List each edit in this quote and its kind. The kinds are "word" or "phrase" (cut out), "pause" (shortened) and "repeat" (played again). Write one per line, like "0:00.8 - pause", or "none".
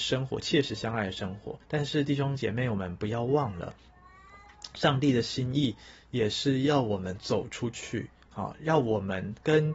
0:01.6 - pause